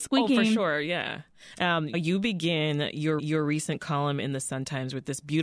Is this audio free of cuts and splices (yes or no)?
no